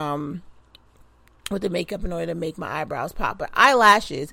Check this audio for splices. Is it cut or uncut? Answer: uncut